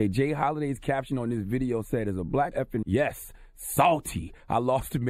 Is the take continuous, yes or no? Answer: no